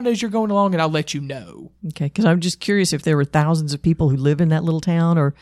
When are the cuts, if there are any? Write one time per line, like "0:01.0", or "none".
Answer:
0:01.8